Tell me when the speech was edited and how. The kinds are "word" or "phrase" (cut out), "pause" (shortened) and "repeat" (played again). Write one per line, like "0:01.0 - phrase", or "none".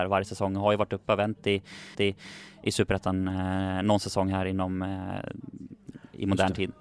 0:01.9 - repeat